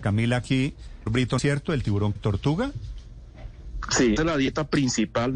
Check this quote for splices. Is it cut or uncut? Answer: cut